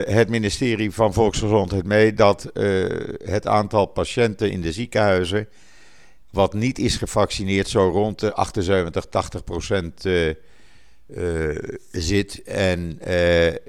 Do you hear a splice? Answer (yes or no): no